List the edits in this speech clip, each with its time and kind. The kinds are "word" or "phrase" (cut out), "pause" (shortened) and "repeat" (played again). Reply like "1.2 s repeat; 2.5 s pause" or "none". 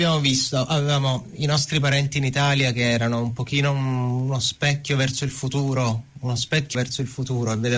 6.7 s word